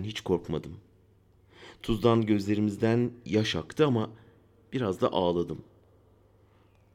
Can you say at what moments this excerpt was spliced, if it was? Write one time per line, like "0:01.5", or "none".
none